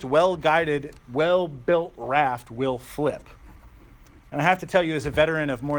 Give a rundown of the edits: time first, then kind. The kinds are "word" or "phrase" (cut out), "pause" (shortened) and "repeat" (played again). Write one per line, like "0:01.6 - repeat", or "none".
none

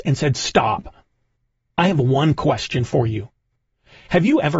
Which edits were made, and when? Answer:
none

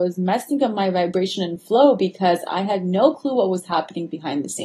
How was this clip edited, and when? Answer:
none

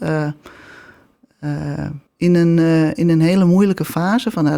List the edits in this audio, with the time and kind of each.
0:02.1 - pause

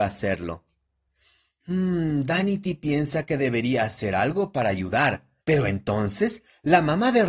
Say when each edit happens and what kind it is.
0:05.4 - pause

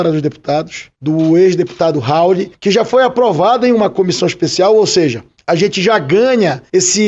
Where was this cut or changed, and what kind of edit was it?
none

